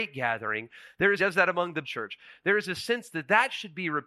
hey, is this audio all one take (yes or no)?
no